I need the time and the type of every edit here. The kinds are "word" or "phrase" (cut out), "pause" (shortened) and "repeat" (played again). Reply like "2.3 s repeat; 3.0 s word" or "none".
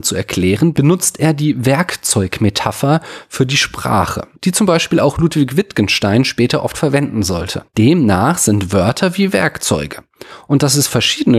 4.4 s pause